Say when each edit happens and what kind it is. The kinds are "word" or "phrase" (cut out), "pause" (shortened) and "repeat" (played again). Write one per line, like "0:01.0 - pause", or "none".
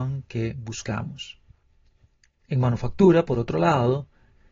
none